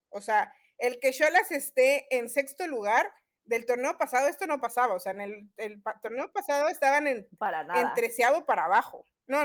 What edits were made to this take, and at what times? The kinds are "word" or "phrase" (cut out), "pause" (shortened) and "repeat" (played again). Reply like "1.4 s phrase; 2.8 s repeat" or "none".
none